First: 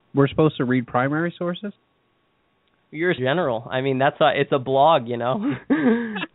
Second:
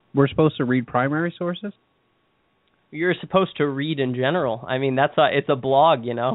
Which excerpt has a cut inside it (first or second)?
first